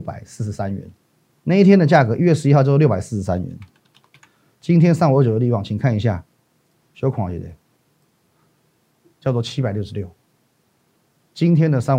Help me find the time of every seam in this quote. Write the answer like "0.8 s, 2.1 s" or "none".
1.3 s